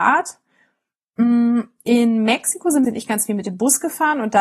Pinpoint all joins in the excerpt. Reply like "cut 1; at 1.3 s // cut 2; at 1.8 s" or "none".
cut 1; at 2.8 s

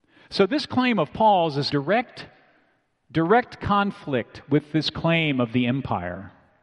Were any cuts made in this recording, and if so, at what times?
cut 1; at 1.7 s

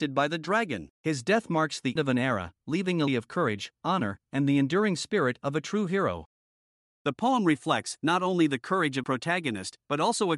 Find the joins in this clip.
cut 1; at 0.9 s // cut 2; at 2.0 s // cut 3; at 3.1 s // cut 4; at 9.0 s

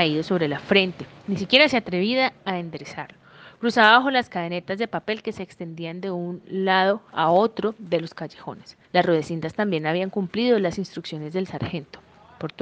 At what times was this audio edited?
cut 1; at 8.8 s

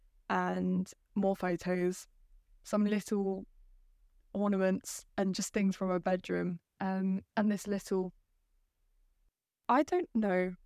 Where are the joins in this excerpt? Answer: cut 1; at 2.2 s // cut 2; at 5.1 s // cut 3; at 7.3 s

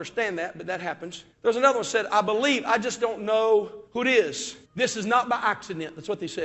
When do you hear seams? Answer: cut 1; at 1.3 s // cut 2; at 3.9 s // cut 3; at 4.6 s

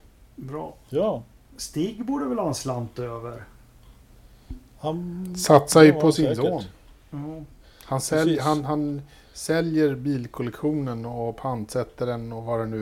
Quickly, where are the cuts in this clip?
none

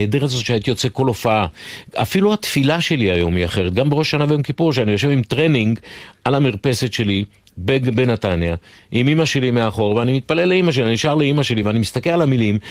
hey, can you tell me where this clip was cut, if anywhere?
none

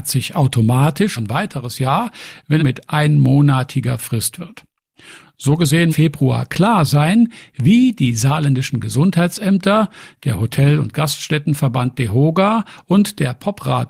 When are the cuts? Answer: cut 1; at 1.2 s // cut 2; at 2.6 s // cut 3; at 4.3 s // cut 4; at 5.9 s

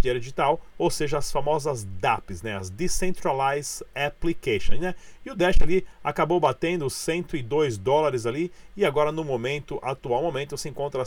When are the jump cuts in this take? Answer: none

